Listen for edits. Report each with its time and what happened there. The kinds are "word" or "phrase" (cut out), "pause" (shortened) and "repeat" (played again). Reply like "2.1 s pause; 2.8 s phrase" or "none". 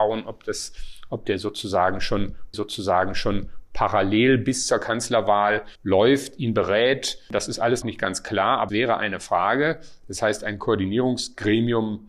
2.5 s repeat; 5.7 s pause; 7.8 s word; 8.7 s word